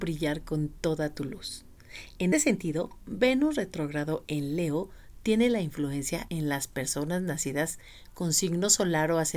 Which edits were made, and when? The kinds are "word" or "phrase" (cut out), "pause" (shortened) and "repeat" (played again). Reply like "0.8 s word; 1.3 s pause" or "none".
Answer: 2.3 s word; 6.3 s word